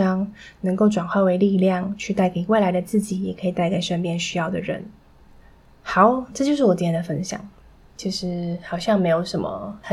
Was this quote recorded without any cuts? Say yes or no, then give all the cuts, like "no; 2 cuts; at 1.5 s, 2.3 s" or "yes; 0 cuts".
yes; 0 cuts